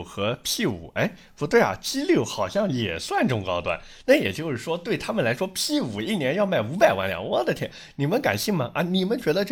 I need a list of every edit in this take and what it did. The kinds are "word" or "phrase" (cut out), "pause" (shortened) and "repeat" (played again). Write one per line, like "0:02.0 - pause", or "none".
none